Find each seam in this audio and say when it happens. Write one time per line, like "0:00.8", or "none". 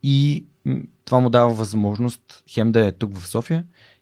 none